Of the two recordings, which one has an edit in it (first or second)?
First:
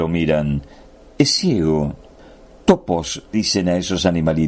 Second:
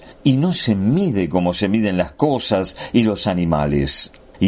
first